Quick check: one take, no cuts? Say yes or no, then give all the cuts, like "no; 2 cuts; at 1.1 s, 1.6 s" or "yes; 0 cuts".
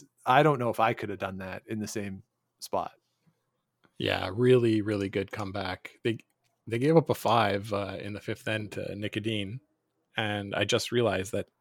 yes; 0 cuts